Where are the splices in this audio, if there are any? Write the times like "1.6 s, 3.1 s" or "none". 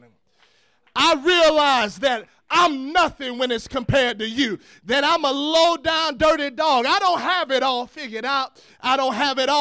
none